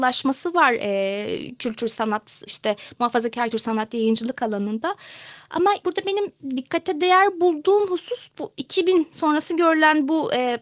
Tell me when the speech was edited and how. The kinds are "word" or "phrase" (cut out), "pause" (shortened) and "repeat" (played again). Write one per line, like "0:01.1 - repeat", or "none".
0:02.5 - word
0:03.5 - word
0:05.8 - word

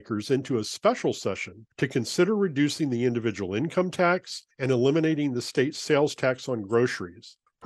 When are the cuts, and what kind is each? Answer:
0:04.5 - pause

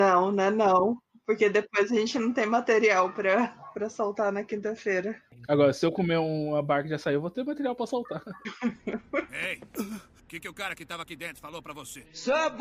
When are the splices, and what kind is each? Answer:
none

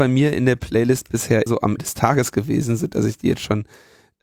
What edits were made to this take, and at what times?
0:01.5 - word
0:01.8 - word

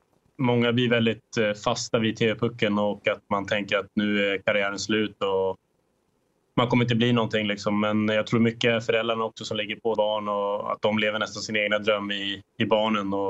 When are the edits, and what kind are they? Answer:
0:09.9 - word

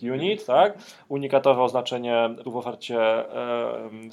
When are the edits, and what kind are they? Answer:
0:02.4 - word

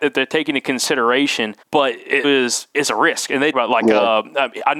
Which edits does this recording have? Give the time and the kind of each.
0:01.6 - pause
0:02.2 - word
0:03.5 - word

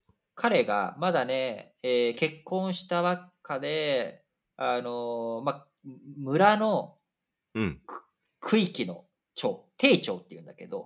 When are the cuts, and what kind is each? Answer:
none

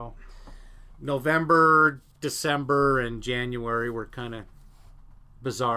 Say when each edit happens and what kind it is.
0:00.9 - word
0:02.1 - pause

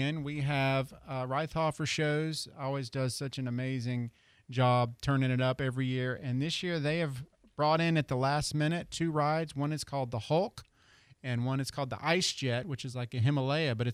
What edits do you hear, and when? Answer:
none

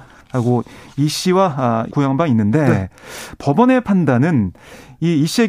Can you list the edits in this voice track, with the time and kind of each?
0:01.9 - phrase

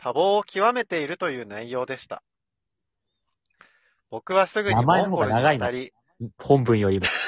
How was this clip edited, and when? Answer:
none

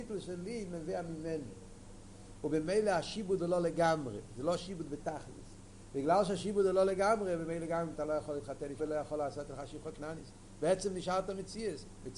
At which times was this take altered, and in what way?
0:07.9 - word
0:08.8 - word

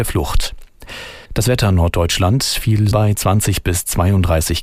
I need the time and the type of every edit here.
0:01.3 - pause
0:02.9 - word

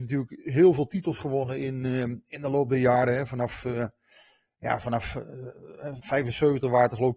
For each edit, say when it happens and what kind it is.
0:06.0 - word

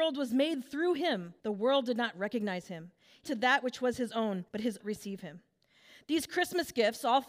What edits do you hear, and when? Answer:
0:01.4 - pause
0:03.2 - word
0:04.5 - pause
0:04.8 - phrase

